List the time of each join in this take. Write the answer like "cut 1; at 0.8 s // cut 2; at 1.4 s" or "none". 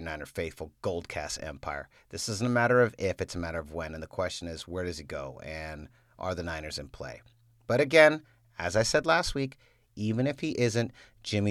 none

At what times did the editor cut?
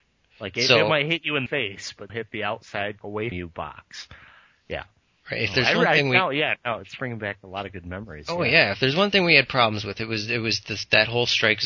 cut 1; at 1.5 s // cut 2; at 2.1 s // cut 3; at 3.0 s // cut 4; at 3.3 s

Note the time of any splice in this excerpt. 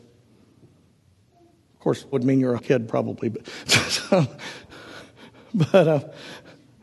cut 1; at 2.1 s // cut 2; at 2.6 s

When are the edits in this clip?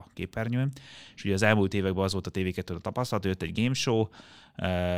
none

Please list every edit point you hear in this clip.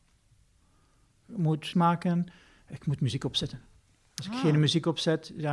cut 1; at 1.7 s

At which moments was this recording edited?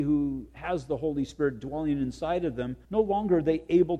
cut 1; at 2.8 s

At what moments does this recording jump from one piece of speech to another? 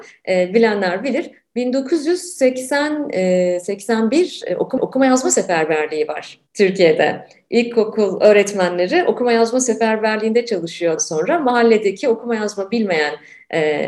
cut 1; at 4.8 s // cut 2; at 6.5 s // cut 3; at 11.0 s

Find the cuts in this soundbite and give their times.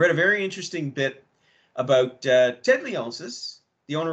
none

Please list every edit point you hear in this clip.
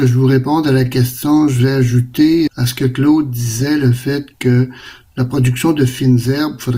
cut 1; at 2.5 s

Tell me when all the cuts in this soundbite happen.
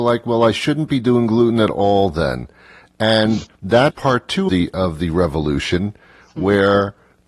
cut 1; at 3.9 s // cut 2; at 4.5 s

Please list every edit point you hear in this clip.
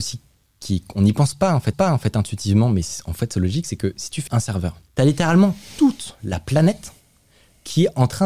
cut 1; at 1.7 s // cut 2; at 4.3 s // cut 3; at 4.9 s

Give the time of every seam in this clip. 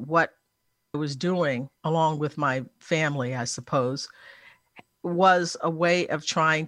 cut 1; at 0.9 s // cut 2; at 1.8 s // cut 3; at 2.8 s

